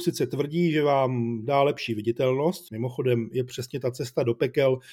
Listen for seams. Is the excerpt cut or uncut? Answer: cut